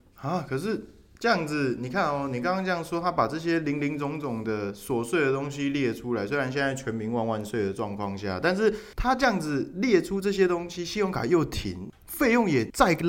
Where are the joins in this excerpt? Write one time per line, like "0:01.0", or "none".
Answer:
none